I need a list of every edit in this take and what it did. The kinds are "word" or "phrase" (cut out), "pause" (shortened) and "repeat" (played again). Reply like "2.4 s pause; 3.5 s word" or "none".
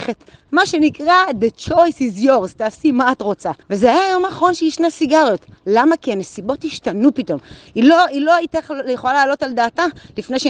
3.6 s pause